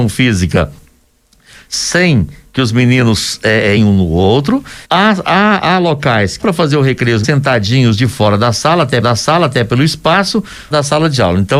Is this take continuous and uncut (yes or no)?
no